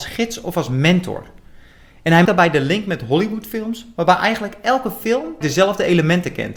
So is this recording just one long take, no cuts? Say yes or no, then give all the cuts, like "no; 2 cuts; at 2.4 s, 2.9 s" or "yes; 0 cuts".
no; 2 cuts; at 2.2 s, 5.4 s